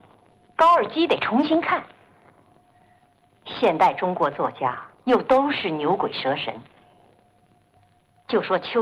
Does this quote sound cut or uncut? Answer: cut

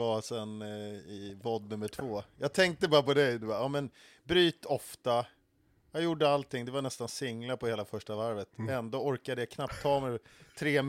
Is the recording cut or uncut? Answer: uncut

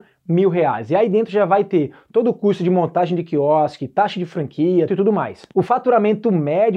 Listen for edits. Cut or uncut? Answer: cut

